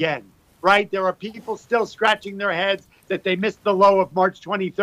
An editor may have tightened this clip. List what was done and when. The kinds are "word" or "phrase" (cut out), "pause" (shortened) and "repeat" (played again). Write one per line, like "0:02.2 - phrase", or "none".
none